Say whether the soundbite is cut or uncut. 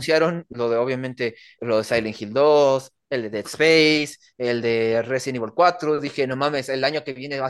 cut